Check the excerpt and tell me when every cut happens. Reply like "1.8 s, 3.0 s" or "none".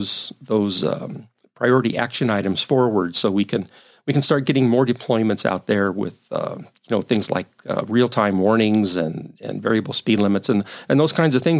none